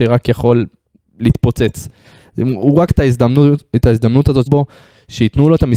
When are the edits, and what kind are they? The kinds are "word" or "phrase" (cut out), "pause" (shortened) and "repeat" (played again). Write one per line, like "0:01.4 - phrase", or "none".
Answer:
0:02.9 - word
0:04.5 - word